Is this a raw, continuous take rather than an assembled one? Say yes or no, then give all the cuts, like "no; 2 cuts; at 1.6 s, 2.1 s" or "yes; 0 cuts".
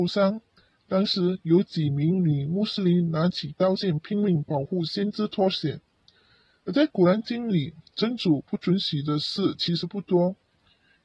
yes; 0 cuts